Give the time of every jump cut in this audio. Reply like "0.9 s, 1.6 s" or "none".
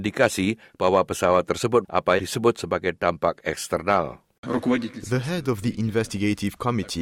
1.8 s, 2.2 s, 4.4 s